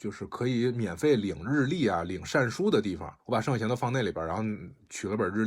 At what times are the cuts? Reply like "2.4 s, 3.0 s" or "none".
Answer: 3.2 s

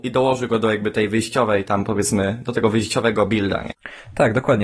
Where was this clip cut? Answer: none

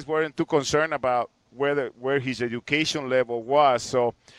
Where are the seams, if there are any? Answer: none

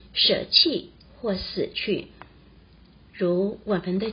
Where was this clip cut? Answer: none

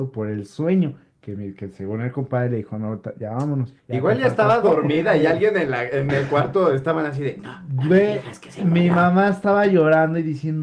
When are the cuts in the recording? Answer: 3.8 s

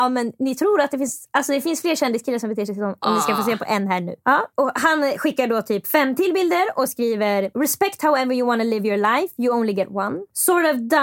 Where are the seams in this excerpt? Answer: 3.0 s

